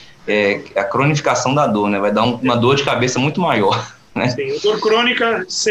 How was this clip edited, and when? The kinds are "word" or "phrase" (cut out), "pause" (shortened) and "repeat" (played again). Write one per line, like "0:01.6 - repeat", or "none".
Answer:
none